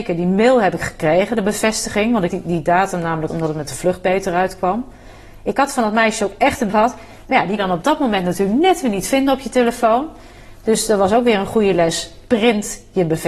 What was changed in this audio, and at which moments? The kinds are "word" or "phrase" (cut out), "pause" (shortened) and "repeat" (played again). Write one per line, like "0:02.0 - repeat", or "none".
0:02.3 - word
0:03.3 - word
0:06.7 - word
0:07.6 - phrase